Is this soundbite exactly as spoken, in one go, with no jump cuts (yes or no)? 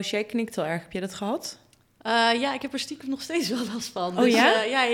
yes